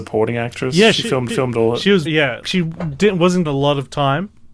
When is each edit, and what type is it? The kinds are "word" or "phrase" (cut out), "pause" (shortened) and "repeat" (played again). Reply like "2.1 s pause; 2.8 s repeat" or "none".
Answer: 1.3 s repeat; 2.1 s word; 2.4 s word; 3.4 s word